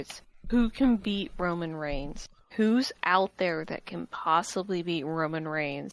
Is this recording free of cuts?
yes; 0 cuts

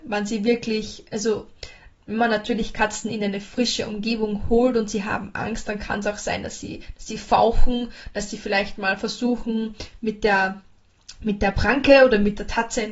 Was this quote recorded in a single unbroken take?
yes; 0 cuts

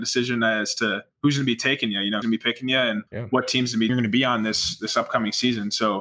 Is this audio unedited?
no; 4 cuts; at 1.1 s, 2.2 s, 3.1 s, 3.9 s

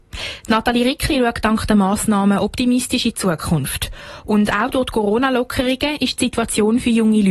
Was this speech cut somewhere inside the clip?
no; 0 cuts

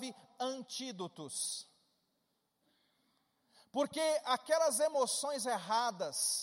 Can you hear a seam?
no; 0 cuts

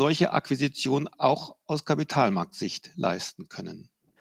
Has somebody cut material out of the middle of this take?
no; 0 cuts

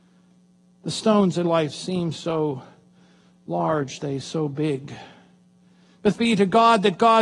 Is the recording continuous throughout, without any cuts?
no; 3 cuts; at 1.4 s, 4.0 s, 6.1 s

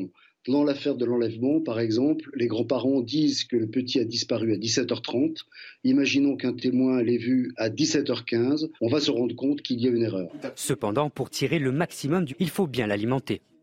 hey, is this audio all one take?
no; 2 cuts; at 8.8 s, 12.3 s

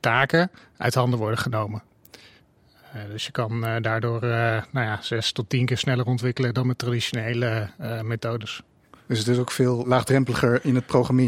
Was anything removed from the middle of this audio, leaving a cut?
no; 0 cuts

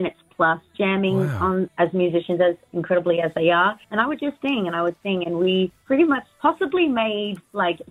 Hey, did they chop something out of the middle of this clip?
yes; 1 cut; at 3.8 s

